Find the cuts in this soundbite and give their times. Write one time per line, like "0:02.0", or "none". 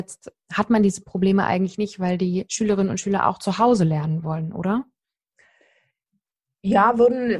none